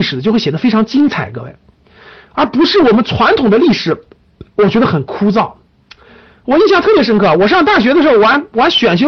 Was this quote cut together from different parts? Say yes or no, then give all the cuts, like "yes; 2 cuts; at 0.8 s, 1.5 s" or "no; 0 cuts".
no; 0 cuts